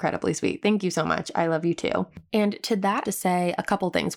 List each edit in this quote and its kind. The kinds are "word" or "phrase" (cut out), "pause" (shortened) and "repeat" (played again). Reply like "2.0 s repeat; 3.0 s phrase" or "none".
3.0 s phrase